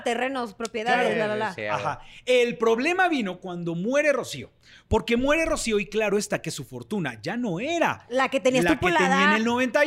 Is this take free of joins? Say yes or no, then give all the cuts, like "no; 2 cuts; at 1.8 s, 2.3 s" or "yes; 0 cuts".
yes; 0 cuts